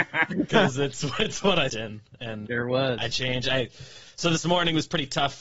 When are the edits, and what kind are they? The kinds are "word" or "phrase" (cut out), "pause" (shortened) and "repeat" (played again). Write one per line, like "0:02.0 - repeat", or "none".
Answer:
0:01.7 - word
0:02.5 - word
0:03.1 - word

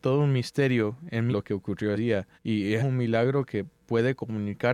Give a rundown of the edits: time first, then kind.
0:01.3 - word
0:01.9 - word
0:02.4 - pause
0:02.8 - phrase
0:03.8 - word

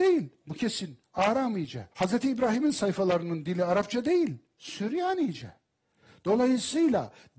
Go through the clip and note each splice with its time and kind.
0:01.9 - pause

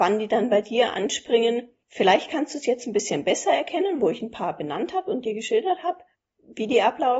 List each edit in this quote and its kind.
0:06.1 - pause

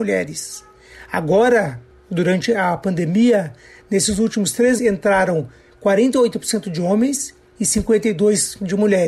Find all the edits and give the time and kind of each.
0:04.8 - word

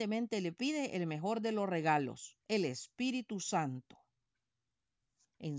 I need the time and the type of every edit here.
0:02.4 - pause

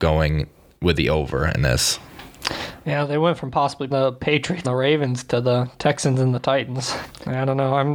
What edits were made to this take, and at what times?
0:03.9 - word
0:04.6 - word

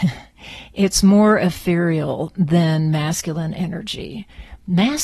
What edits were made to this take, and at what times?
none

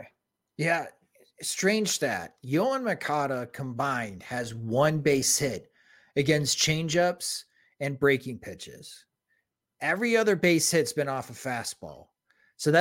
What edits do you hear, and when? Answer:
none

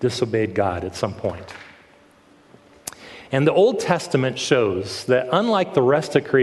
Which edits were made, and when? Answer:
none

